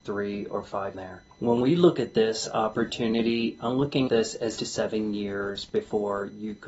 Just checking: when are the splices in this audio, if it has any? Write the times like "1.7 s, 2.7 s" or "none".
0.9 s, 1.3 s, 4.1 s, 4.6 s